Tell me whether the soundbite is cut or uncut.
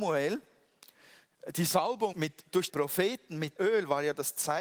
cut